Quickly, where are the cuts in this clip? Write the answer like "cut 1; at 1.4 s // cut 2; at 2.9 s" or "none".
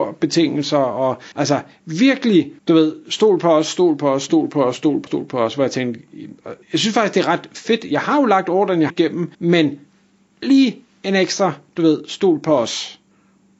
cut 1; at 1.3 s // cut 2; at 2.6 s // cut 3; at 5.1 s // cut 4; at 6.6 s // cut 5; at 8.9 s // cut 6; at 9.3 s